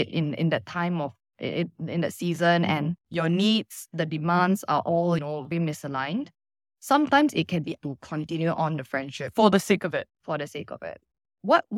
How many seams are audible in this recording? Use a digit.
4